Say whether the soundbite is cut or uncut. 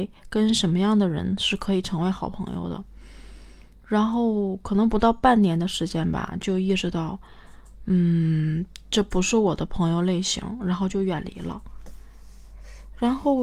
uncut